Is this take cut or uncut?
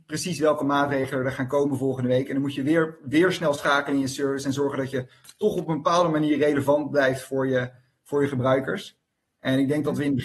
uncut